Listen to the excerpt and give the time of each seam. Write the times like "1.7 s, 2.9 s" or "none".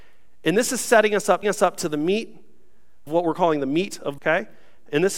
1.4 s, 3.1 s, 4.2 s